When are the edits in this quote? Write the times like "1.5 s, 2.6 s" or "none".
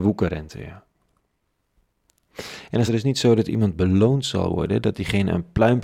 2.9 s